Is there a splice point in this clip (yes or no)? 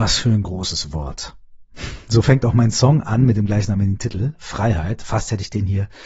no